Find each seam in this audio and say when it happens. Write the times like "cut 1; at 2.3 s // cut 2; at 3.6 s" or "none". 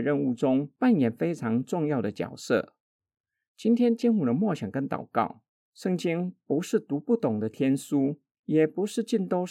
none